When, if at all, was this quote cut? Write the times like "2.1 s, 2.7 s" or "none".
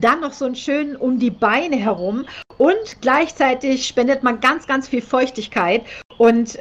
none